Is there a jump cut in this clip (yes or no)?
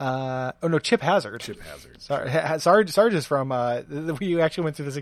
no